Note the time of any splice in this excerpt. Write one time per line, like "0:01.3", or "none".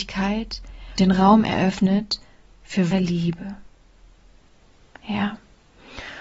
0:01.0
0:02.9